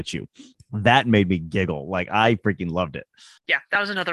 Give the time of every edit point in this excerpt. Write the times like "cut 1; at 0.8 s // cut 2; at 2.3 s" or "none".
none